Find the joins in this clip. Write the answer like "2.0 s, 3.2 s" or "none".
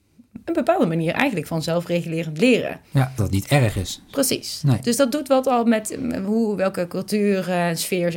3.2 s

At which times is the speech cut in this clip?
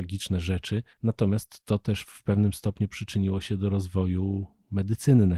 0.9 s

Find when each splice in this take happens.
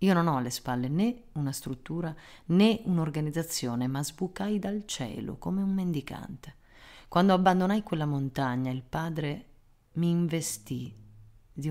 none

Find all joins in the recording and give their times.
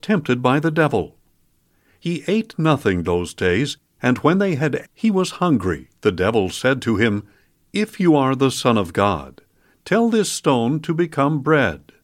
3.0 s, 4.8 s, 6.0 s

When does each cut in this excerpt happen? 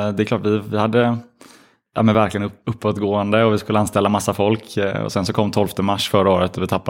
none

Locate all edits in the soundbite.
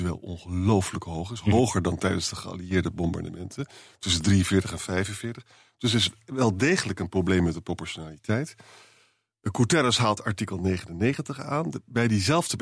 none

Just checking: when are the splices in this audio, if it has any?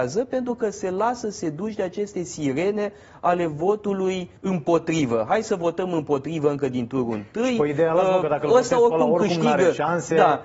4.4 s

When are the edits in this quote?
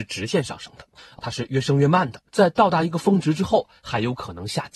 2.3 s

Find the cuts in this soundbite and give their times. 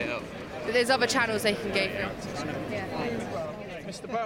none

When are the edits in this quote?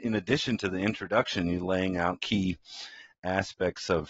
2.2 s

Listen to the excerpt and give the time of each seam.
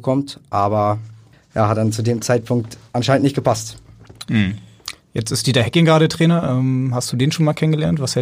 1.3 s

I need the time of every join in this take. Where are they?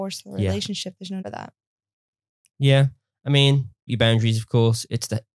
1.2 s, 3.9 s

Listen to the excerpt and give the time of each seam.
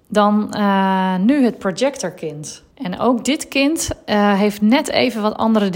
2.7 s

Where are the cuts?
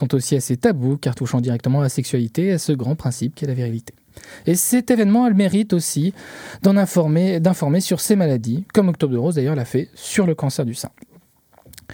none

